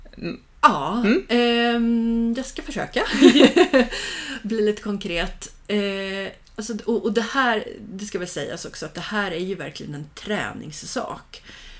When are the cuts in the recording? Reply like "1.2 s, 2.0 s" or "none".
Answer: 6.4 s